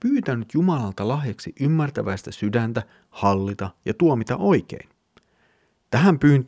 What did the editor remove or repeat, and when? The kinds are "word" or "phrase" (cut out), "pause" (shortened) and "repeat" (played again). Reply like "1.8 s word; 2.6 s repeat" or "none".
none